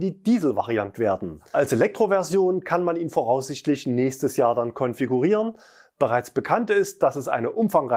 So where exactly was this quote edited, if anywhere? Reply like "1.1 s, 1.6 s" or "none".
0.9 s